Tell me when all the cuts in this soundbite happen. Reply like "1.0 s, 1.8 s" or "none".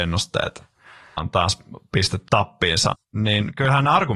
1.2 s, 2.3 s, 2.9 s